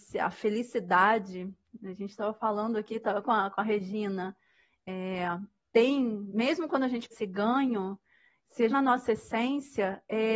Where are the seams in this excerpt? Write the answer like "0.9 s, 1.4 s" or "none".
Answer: 3.2 s, 7.1 s, 8.7 s